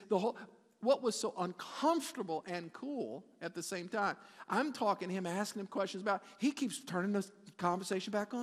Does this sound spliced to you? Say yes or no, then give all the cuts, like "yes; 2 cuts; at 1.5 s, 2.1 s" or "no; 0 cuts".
no; 0 cuts